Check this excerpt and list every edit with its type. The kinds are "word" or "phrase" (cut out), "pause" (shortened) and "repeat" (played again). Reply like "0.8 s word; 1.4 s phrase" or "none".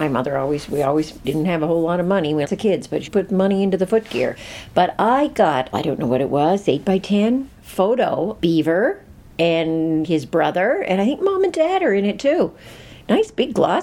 1.2 s word; 2.4 s word; 3.1 s word; 5.7 s phrase; 8.4 s word; 10.0 s word